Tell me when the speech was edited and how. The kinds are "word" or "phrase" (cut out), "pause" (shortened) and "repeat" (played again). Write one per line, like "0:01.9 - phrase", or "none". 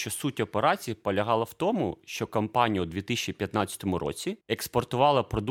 0:04.4 - pause